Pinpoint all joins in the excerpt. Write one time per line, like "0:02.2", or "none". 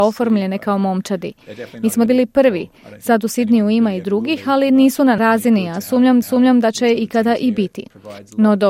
0:02.1
0:05.2
0:06.2